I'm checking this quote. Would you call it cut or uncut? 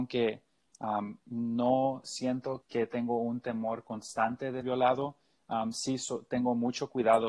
cut